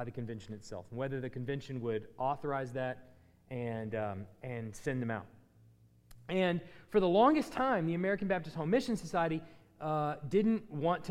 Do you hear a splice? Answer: no; 0 cuts

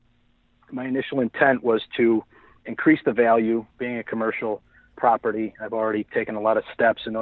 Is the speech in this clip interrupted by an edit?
yes; 1 cut; at 3.7 s

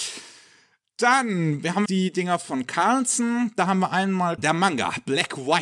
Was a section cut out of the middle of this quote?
yes; 2 cuts; at 1.9 s, 4.4 s

